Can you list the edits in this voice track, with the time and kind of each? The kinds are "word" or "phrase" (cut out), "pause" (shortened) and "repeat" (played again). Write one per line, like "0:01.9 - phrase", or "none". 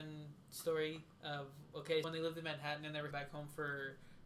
0:02.0 - word
0:03.1 - word